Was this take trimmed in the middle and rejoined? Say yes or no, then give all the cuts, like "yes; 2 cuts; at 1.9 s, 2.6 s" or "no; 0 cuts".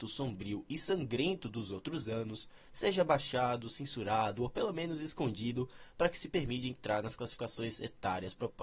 no; 0 cuts